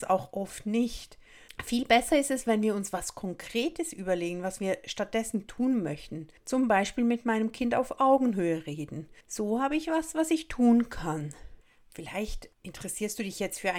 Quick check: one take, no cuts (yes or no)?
no